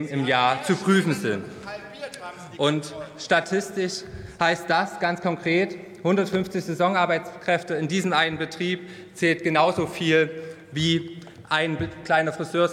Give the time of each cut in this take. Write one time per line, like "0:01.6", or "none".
none